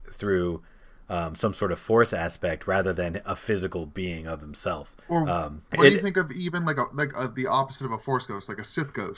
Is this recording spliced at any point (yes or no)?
yes